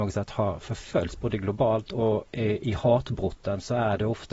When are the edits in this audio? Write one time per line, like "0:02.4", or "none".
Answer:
none